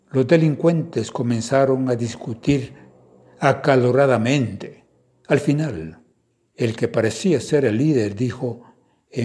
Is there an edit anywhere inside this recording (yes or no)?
no